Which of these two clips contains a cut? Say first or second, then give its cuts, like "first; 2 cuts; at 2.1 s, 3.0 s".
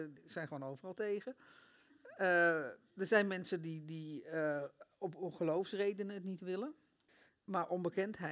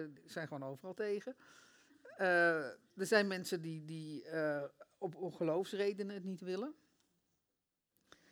first; 1 cut; at 7.1 s